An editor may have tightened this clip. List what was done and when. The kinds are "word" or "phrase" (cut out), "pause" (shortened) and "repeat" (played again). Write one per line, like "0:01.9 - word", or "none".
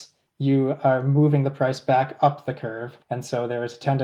0:03.0 - pause